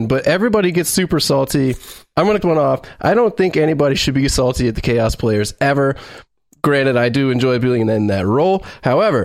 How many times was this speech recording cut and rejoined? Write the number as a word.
one